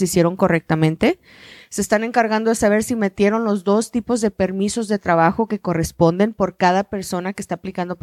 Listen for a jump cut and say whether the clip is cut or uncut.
uncut